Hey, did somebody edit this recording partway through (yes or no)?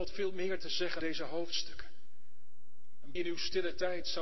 yes